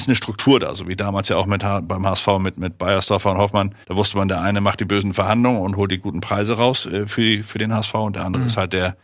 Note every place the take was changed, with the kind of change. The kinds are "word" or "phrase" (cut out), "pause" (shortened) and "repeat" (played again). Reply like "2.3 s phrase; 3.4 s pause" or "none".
3.8 s pause